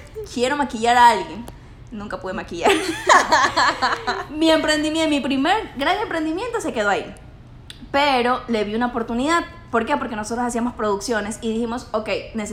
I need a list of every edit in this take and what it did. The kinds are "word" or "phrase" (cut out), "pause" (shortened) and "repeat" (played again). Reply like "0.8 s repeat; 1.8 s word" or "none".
none